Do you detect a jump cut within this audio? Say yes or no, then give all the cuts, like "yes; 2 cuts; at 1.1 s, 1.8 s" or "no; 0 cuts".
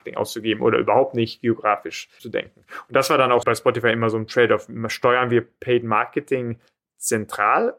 yes; 1 cut; at 3.4 s